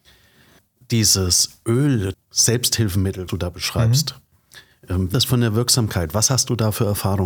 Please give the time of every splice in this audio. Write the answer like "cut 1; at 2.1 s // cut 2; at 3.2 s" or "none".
cut 1; at 2.1 s // cut 2; at 3.3 s // cut 3; at 5.1 s